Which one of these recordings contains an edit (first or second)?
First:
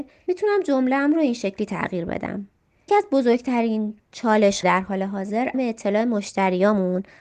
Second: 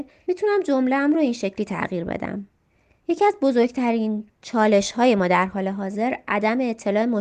first